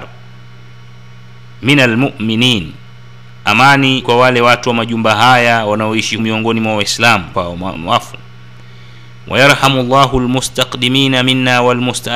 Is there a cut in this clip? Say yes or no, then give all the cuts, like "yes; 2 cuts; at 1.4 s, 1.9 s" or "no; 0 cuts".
yes; 4 cuts; at 4.0 s, 6.2 s, 7.3 s, 7.7 s